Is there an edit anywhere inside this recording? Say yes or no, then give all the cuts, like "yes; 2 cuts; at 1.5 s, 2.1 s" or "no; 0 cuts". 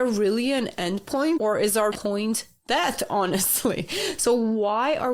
yes; 1 cut; at 1.9 s